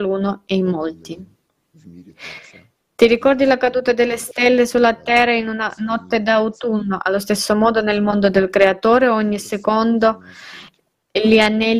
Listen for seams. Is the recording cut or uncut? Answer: uncut